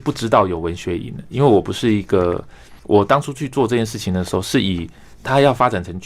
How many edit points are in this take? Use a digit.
2